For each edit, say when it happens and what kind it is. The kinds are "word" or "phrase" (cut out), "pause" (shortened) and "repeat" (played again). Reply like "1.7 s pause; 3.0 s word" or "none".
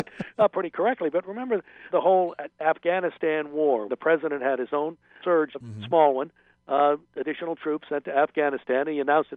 1.9 s word; 3.9 s word; 5.2 s word; 5.5 s word; 7.0 s pause